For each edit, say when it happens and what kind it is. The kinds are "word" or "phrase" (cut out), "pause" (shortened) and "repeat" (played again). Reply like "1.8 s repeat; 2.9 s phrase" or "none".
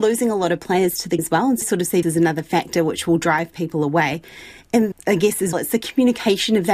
1.2 s word; 1.6 s word; 2.0 s word; 4.9 s word; 5.5 s word